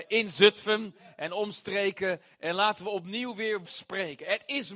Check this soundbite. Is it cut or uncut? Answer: cut